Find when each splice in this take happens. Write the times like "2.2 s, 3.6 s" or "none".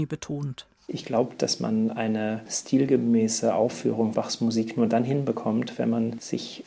4.1 s